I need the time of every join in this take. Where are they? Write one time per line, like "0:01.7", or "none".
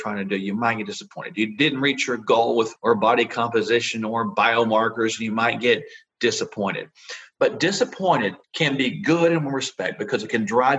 0:02.8
0:08.4